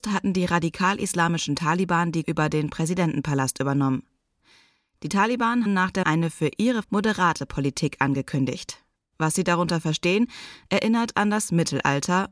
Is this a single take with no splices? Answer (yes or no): no